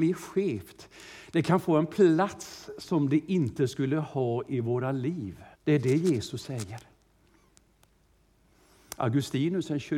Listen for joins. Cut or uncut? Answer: cut